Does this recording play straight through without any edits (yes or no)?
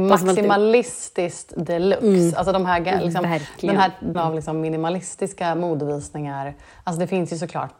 no